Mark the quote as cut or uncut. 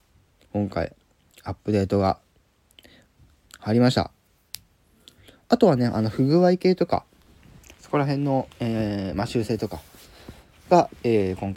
cut